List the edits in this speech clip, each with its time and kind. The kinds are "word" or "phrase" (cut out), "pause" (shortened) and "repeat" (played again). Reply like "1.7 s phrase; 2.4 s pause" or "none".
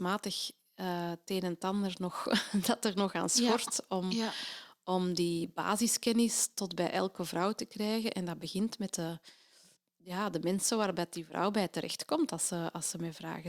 none